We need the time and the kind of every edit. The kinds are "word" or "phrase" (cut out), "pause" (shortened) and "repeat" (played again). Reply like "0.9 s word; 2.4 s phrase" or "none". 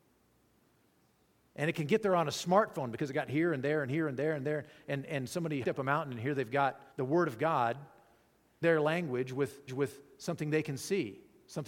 5.6 s word; 6.9 s pause; 8.6 s word; 9.7 s repeat